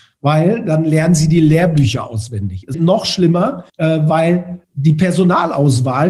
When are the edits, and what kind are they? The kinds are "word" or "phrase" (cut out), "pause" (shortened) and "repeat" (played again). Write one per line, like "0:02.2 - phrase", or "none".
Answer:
0:02.7 - word
0:03.7 - pause
0:04.6 - pause